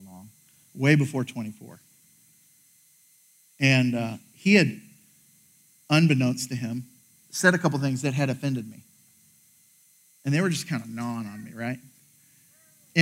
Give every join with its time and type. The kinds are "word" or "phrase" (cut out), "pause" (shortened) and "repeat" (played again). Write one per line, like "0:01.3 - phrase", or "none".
none